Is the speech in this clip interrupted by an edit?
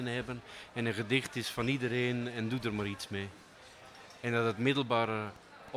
no; 0 cuts

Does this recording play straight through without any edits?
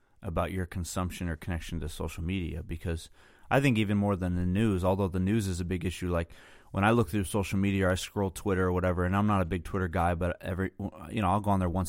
yes; 0 cuts

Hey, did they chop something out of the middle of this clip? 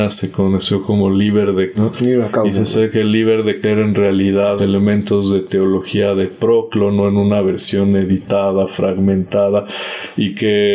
yes; 3 cuts; at 1.7 s, 3.6 s, 4.6 s

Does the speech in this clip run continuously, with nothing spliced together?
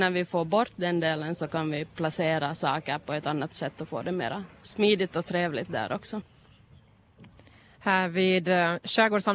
yes; 0 cuts

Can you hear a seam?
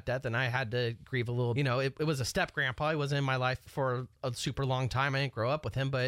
yes; 2 cuts; at 1.5 s, 3.7 s

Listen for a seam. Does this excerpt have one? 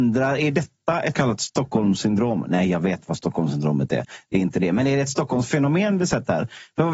yes; 1 cut; at 1.1 s

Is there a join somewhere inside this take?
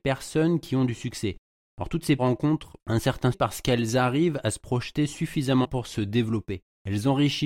yes; 3 cuts; at 2.2 s, 3.3 s, 5.6 s

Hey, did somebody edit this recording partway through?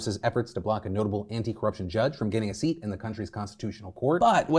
no; 0 cuts

